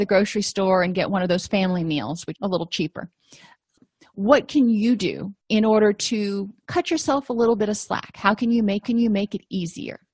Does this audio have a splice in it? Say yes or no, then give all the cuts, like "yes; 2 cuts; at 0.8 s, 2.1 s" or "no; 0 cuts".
yes; 4 cuts; at 2.3 s, 5.4 s, 6.6 s, 8.8 s